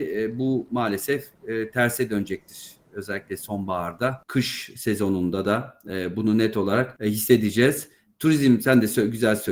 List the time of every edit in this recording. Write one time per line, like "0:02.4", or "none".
none